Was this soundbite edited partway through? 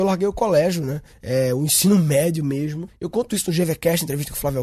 no; 0 cuts

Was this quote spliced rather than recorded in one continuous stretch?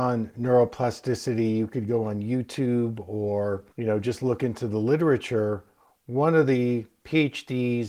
yes; 2 cuts; at 3.7 s, 5.8 s

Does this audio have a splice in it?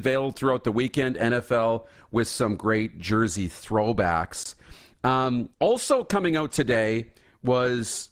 yes; 1 cut; at 5.5 s

